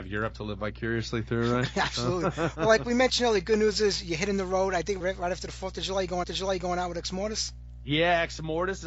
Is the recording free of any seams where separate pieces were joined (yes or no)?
no